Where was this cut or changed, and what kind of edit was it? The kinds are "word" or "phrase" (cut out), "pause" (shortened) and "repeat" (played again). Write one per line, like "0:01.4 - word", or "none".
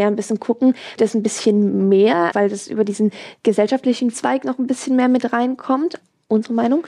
0:01.0 - word
0:02.3 - word
0:04.1 - word